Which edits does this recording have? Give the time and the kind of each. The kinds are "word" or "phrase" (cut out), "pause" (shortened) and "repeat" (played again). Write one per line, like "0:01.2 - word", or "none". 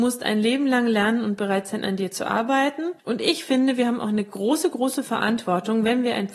0:03.0 - pause